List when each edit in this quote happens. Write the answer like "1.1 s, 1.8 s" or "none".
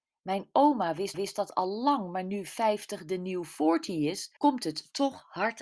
1.1 s, 4.4 s